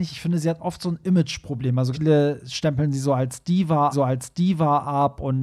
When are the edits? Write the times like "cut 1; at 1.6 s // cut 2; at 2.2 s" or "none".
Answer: cut 1; at 1.9 s // cut 2; at 3.9 s